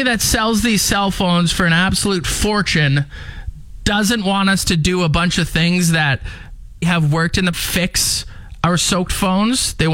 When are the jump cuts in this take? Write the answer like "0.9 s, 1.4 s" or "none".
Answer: 6.8 s, 7.5 s